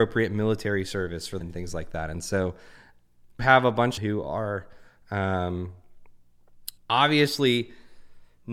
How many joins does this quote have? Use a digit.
4